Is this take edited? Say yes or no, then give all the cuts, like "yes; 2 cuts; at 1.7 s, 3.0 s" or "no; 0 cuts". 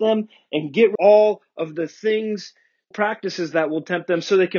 yes; 2 cuts; at 1.0 s, 2.9 s